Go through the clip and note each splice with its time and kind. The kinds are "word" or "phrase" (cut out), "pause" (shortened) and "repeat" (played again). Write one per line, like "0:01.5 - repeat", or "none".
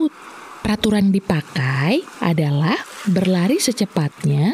0:01.0 - word